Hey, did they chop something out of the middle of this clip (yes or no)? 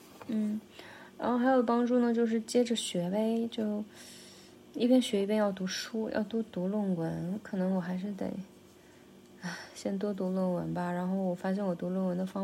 no